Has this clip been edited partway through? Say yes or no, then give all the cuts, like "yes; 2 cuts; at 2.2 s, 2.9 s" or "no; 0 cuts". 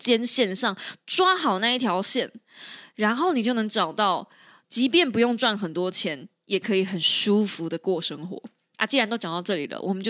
no; 0 cuts